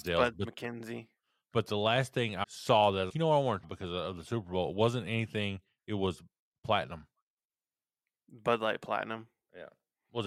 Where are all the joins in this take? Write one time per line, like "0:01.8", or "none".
0:02.4
0:03.1
0:03.6
0:06.5